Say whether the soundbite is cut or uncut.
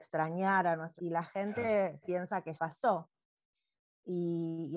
cut